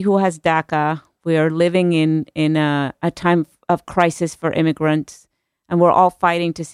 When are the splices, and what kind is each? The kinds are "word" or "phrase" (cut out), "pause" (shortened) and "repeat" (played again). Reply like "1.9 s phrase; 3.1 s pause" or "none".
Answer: none